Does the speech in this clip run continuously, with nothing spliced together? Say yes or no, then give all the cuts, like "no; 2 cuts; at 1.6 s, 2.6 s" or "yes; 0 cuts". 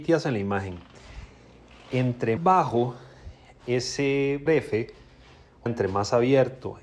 no; 3 cuts; at 2.4 s, 4.5 s, 5.7 s